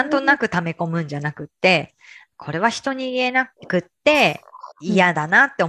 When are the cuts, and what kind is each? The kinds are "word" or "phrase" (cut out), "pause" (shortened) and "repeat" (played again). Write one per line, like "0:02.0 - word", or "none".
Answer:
0:03.6 - pause
0:04.7 - pause